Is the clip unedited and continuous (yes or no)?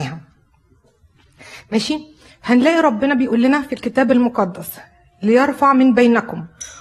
yes